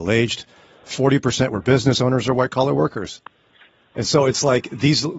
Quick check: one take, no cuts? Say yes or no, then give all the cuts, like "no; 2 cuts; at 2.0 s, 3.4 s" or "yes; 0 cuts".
yes; 0 cuts